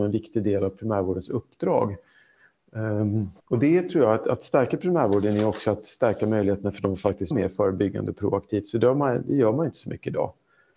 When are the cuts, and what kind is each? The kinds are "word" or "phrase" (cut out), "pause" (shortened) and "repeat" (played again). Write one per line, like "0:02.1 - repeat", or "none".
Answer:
0:03.4 - pause
0:07.3 - word